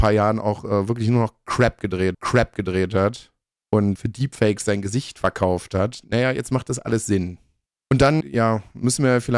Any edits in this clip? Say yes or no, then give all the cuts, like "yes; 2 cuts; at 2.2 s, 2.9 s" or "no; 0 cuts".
yes; 3 cuts; at 2.1 s, 4.0 s, 8.2 s